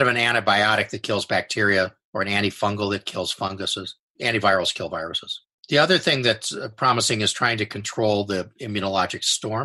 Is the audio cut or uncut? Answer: cut